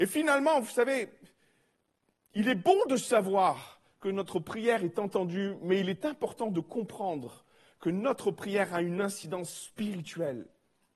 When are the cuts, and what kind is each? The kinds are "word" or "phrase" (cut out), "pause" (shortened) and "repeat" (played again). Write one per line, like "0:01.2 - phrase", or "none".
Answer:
none